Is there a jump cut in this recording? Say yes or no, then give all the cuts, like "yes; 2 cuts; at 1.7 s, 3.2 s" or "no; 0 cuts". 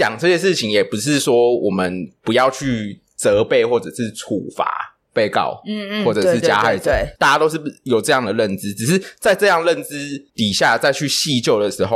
yes; 2 cuts; at 7.2 s, 10.3 s